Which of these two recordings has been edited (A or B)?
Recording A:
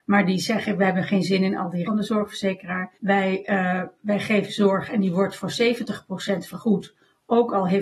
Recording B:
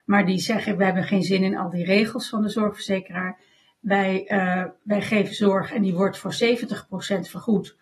A